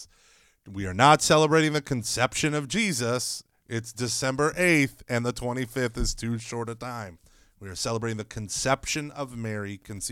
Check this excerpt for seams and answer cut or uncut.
uncut